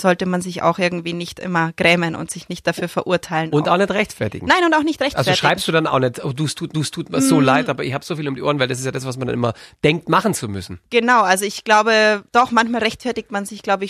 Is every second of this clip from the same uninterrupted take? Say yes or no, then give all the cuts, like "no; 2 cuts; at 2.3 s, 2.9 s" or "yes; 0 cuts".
no; 2 cuts; at 6.7 s, 12.3 s